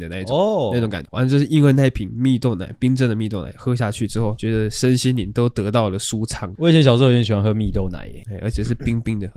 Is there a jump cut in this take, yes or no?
yes